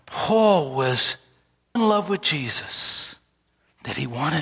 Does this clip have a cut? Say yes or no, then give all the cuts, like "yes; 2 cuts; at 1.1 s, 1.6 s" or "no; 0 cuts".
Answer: yes; 1 cut; at 1.8 s